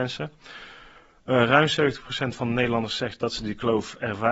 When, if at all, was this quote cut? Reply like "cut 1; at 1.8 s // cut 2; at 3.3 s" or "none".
none